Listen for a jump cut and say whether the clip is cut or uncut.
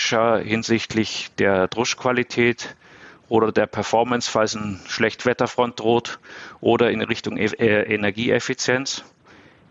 uncut